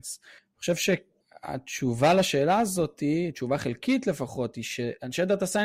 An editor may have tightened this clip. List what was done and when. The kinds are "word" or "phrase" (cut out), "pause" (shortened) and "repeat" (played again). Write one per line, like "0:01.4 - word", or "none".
none